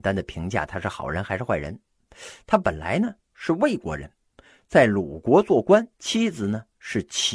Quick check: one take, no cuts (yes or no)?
no